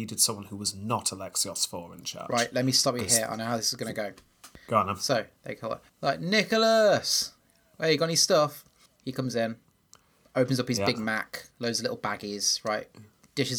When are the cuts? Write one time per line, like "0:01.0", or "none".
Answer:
0:05.9
0:08.9